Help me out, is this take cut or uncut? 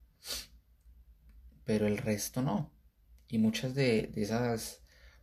uncut